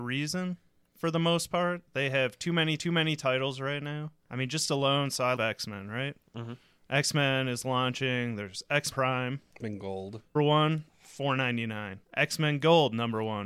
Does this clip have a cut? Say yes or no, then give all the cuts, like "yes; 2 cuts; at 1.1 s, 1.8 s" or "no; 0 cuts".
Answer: yes; 8 cuts; at 2.8 s, 4.2 s, 5.4 s, 8.9 s, 9.6 s, 10.4 s, 10.9 s, 12.0 s